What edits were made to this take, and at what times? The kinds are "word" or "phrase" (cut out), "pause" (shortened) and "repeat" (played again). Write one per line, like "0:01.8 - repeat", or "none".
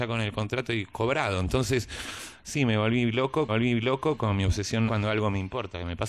0:03.5 - repeat
0:04.9 - word